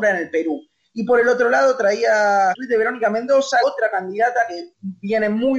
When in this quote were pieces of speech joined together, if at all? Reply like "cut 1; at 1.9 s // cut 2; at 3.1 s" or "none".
cut 1; at 2.5 s // cut 2; at 3.6 s

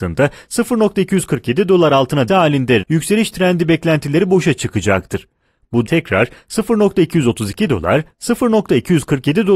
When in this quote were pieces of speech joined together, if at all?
cut 1; at 2.3 s // cut 2; at 2.8 s // cut 3; at 5.8 s

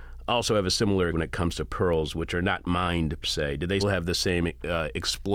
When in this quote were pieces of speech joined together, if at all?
cut 1; at 1.1 s // cut 2; at 3.2 s // cut 3; at 3.8 s

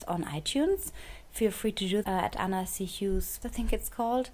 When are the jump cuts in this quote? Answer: cut 1; at 2.0 s // cut 2; at 3.4 s

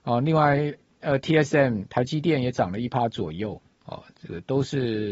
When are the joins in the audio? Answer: none

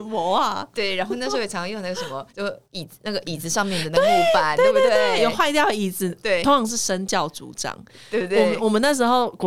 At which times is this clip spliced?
cut 1; at 2.3 s // cut 2; at 2.6 s

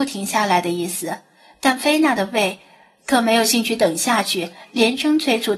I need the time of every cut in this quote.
none

